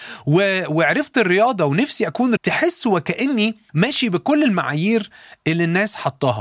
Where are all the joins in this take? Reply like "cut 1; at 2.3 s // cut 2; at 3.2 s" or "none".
cut 1; at 2.4 s // cut 2; at 3.7 s